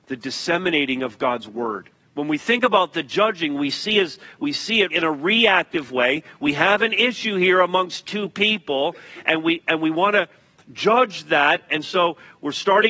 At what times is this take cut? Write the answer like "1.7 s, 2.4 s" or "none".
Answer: 1.9 s, 4.9 s